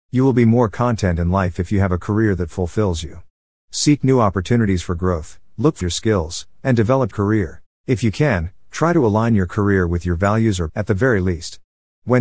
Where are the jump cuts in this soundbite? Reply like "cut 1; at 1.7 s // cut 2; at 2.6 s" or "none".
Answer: cut 1; at 5.8 s // cut 2; at 7.1 s // cut 3; at 7.7 s // cut 4; at 10.7 s